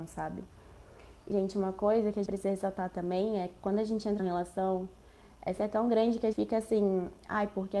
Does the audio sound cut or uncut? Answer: cut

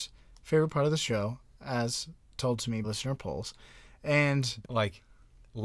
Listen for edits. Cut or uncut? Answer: cut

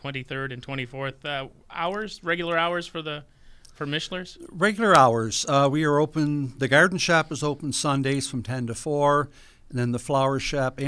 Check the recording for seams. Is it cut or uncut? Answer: cut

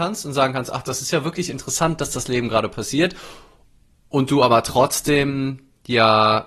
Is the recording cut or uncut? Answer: uncut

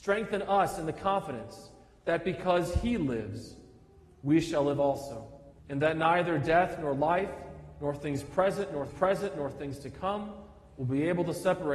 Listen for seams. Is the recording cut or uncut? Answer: cut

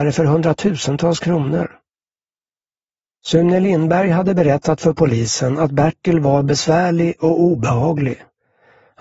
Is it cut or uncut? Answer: uncut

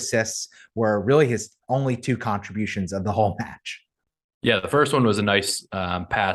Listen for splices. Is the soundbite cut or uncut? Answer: uncut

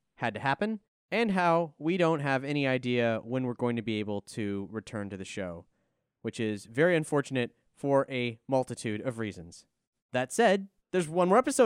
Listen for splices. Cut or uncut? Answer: uncut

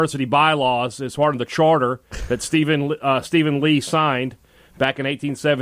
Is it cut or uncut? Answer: uncut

